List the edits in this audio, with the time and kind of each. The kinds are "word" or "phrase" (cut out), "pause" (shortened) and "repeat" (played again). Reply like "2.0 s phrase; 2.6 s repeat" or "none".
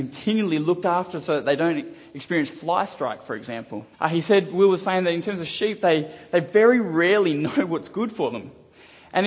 3.9 s pause

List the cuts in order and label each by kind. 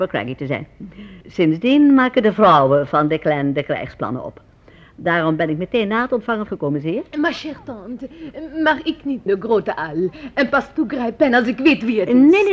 1.2 s pause; 6.5 s phrase; 9.3 s phrase

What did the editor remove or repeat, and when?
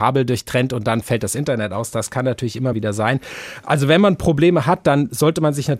2.7 s word

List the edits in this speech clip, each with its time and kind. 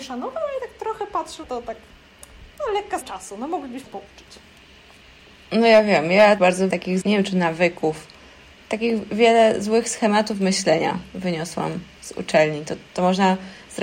1.4 s word; 3.0 s word; 3.9 s word; 6.4 s word; 6.7 s word; 7.0 s word

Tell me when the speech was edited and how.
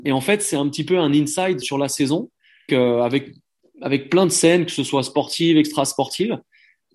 1.6 s word; 2.7 s word

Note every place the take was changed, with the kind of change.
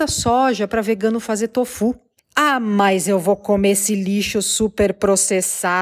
2.2 s pause

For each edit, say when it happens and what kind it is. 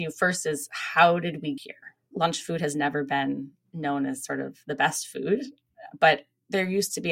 1.6 s word

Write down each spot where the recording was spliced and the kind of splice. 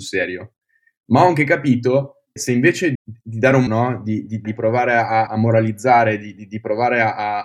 2.4 s word; 2.9 s word; 3.7 s word; 4.4 s word; 5.3 s word

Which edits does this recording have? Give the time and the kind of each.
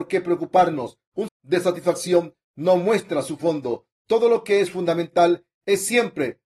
1.3 s phrase

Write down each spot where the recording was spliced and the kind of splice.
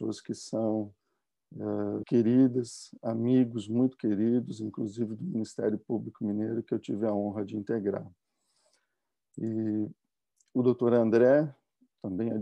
2.0 s word

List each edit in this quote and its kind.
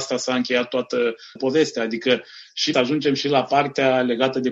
1.4 s word; 2.7 s word

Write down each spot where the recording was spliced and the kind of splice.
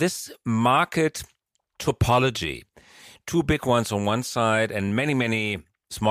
none

